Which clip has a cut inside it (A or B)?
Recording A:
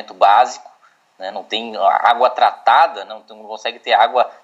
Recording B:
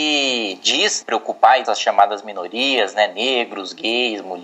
B